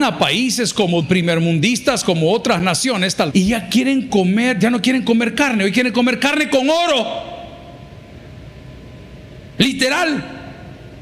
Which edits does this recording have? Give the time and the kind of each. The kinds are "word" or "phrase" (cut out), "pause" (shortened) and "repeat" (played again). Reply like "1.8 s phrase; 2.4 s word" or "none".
1.0 s word; 3.3 s word